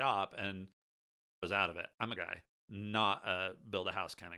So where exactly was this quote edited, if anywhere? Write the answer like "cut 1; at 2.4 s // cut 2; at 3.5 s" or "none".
cut 1; at 1.4 s // cut 2; at 2.2 s